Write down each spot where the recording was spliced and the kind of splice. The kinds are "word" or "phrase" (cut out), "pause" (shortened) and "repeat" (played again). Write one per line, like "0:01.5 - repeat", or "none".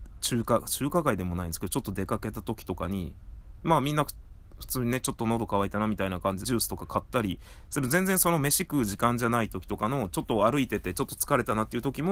0:06.4 - phrase